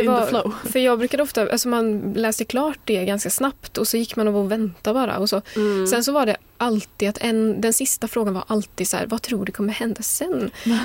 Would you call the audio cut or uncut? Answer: uncut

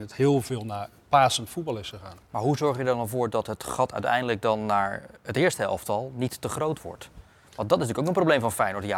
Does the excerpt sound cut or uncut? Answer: uncut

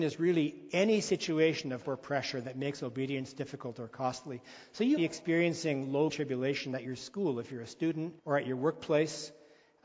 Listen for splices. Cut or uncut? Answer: cut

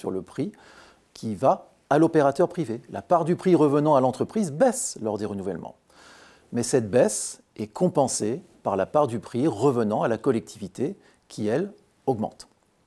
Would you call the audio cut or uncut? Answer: uncut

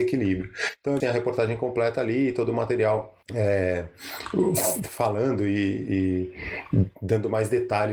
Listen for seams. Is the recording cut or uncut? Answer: cut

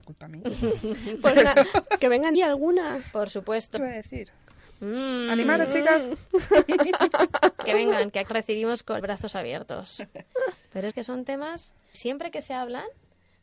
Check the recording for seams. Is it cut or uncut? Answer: cut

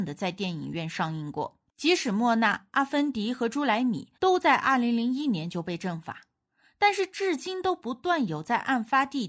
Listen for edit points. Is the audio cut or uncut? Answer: cut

